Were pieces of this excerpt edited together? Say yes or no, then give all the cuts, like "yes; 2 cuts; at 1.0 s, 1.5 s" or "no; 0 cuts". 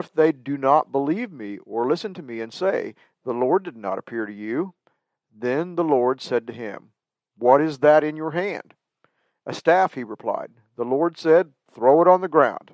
no; 0 cuts